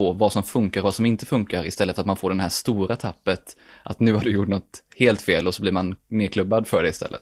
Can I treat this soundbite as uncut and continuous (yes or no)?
no